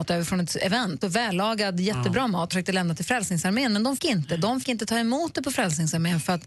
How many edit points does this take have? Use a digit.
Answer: 4